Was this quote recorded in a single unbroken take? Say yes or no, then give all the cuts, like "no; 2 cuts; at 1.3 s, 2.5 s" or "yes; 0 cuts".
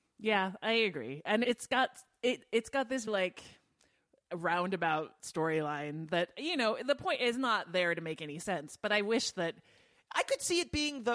no; 2 cuts; at 1.4 s, 3.1 s